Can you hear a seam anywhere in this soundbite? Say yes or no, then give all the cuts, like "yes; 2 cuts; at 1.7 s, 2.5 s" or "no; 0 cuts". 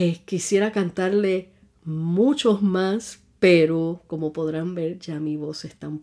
no; 0 cuts